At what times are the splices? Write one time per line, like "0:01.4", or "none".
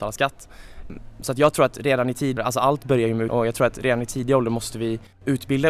0:02.4
0:03.3